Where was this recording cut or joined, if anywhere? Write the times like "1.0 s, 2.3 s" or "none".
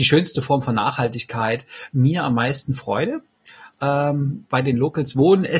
1.9 s